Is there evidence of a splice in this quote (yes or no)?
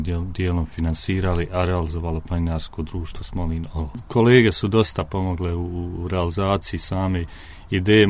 no